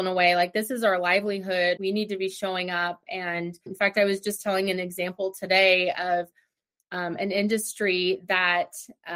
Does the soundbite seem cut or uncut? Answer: cut